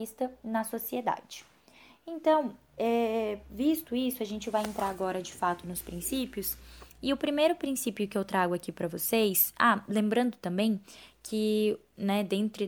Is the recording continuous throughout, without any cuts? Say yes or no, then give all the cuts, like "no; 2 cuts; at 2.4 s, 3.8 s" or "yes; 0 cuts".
yes; 0 cuts